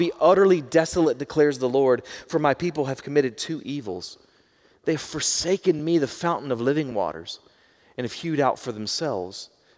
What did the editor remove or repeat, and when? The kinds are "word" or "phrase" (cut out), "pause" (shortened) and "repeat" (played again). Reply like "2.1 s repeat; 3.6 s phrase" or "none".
none